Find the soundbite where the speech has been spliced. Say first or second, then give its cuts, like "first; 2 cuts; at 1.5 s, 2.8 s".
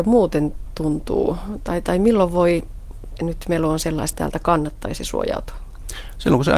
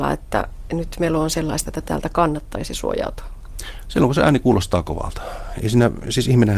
first; 2 cuts; at 3.2 s, 4.1 s